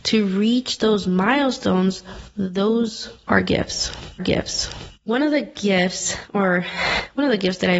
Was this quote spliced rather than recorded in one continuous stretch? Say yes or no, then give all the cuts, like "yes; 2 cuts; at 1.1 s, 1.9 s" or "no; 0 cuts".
yes; 1 cut; at 4.2 s